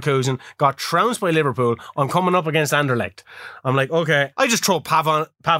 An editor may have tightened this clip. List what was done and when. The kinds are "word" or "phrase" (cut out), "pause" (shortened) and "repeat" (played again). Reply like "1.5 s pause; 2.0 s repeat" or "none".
4.3 s word